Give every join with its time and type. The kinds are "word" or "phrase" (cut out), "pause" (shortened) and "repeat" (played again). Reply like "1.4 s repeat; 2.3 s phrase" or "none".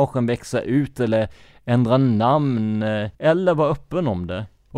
3.1 s pause

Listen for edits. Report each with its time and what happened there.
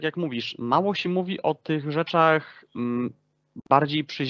none

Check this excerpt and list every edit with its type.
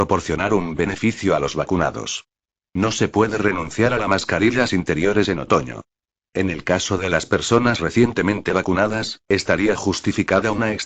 none

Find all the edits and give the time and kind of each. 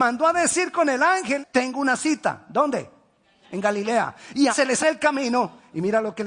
1.4 s word; 4.5 s word; 4.8 s word

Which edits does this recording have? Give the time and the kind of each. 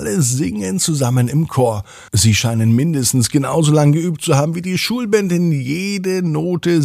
2.1 s pause

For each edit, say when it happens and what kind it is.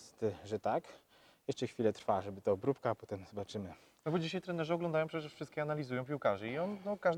none

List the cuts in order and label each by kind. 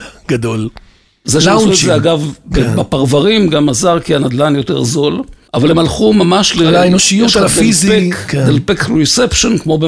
5.5 s pause

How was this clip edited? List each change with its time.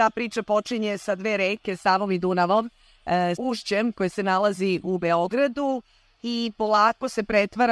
3.4 s word

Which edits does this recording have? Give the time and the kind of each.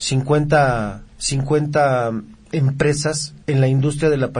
1.1 s pause; 3.4 s pause

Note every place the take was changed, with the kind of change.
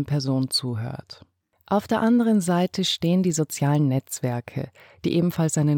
1.4 s pause

